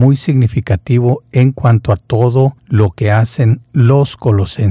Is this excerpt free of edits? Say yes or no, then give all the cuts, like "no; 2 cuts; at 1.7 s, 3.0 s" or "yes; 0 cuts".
no; 1 cut; at 2.6 s